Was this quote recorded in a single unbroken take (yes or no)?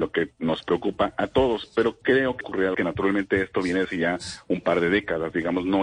no